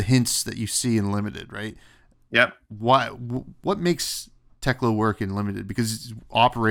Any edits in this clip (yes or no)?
no